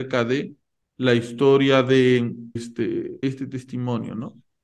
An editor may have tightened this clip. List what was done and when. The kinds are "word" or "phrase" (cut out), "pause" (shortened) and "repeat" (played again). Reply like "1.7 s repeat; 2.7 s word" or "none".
2.6 s word; 3.2 s word